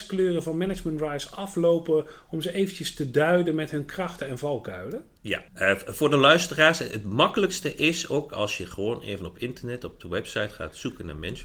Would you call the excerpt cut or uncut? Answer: cut